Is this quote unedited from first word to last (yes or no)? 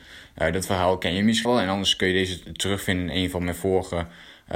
no